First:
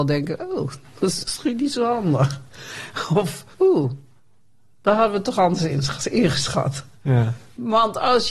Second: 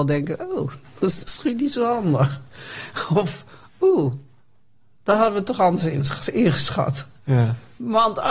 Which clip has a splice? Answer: first; 1 cut; at 3.5 s

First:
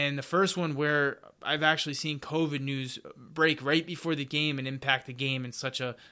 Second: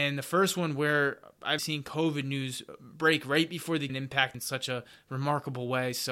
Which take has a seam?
second; 3 cuts; at 1.6 s, 3.9 s, 4.3 s

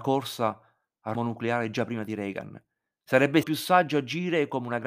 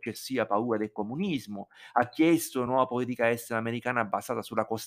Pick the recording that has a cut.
first; 2 cuts; at 1.1 s, 3.4 s

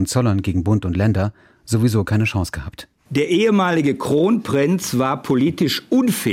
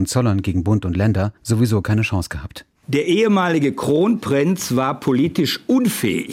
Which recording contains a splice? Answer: second; 1 cut; at 1.4 s

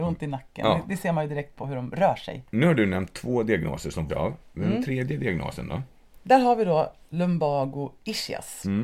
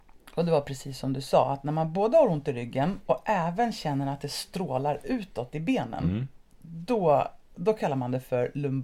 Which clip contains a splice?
first; 1 cut; at 4.1 s

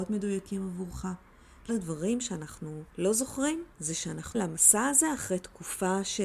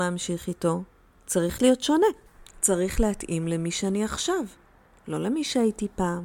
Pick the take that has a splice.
first; 4 cuts; at 1.7 s, 2.9 s, 3.7 s, 4.3 s

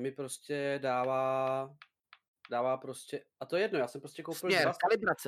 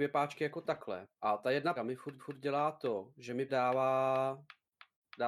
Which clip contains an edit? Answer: second; 4 cuts; at 1.1 s, 1.8 s, 2.2 s, 3.5 s

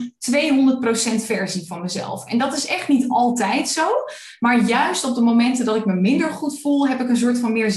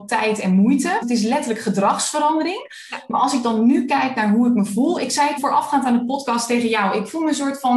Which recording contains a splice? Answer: second; 2 cuts; at 1.0 s, 5.4 s

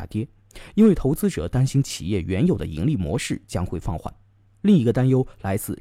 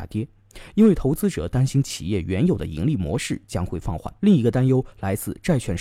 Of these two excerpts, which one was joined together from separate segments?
second; 1 cut; at 4.2 s

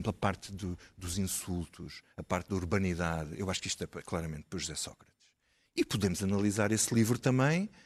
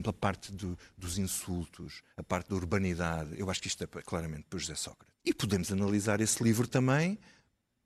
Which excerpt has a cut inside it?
second; 1 cut; at 5.2 s

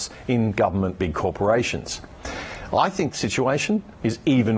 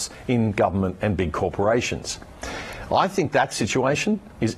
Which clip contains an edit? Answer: first; 2 cuts; at 1.0 s, 3.1 s

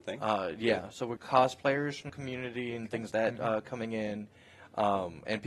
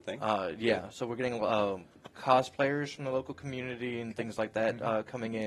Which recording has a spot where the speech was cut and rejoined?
first; 3 cuts; at 1.2 s, 2.1 s, 3.1 s

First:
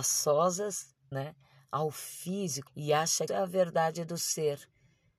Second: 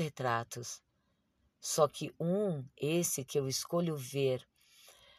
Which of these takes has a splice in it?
first; 3 cuts; at 1.1 s, 2.7 s, 3.3 s

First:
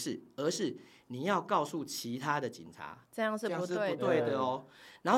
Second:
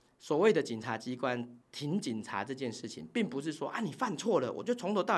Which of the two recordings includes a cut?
second; 1 cut; at 1.6 s

